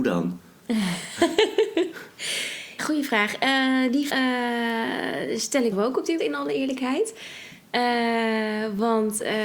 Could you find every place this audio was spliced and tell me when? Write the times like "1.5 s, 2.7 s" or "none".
2.8 s, 4.1 s, 5.7 s, 6.2 s